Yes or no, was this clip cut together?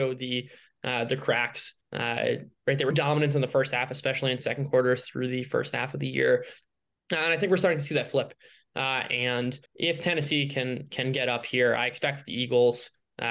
yes